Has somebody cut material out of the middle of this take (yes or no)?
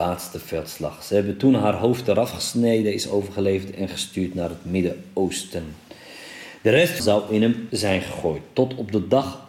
yes